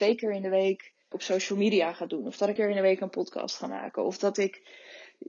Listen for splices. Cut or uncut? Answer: cut